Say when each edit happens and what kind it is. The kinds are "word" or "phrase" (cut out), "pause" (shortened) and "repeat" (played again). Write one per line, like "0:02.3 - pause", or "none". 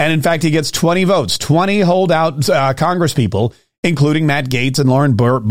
none